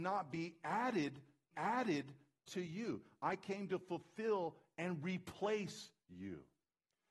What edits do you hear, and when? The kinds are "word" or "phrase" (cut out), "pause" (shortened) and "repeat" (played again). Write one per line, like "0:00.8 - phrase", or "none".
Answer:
0:01.5 - repeat